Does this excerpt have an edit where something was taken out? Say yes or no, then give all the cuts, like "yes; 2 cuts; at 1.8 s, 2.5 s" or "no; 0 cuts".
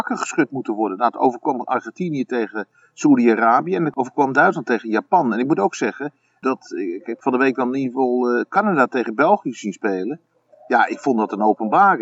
no; 0 cuts